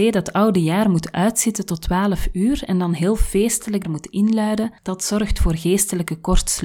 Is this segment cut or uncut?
cut